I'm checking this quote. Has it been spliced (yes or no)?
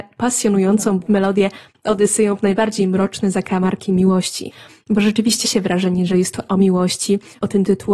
yes